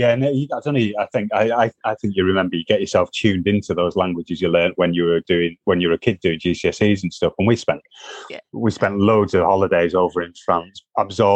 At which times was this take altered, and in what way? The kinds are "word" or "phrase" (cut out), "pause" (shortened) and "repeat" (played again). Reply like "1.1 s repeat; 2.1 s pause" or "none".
none

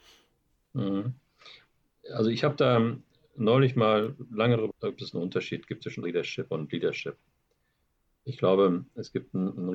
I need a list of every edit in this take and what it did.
4.7 s word; 6.0 s word

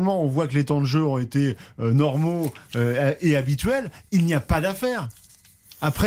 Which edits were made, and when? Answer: none

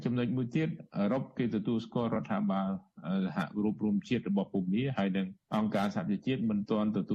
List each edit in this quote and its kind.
5.4 s pause

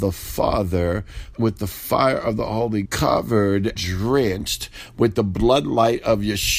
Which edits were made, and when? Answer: 1.3 s word; 2.9 s word; 3.8 s word

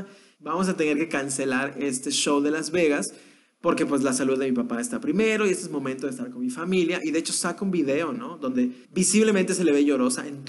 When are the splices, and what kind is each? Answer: 8.8 s pause

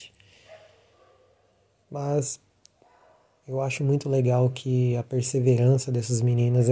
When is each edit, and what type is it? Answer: none

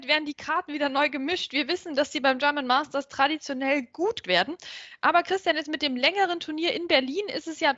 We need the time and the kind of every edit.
4.2 s word

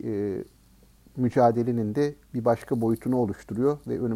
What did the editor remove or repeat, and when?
none

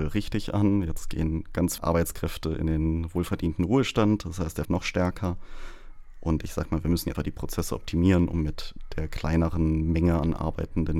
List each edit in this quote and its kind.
1.8 s word; 4.6 s phrase; 7.1 s word

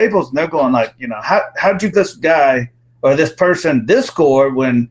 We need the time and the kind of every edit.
1.9 s word

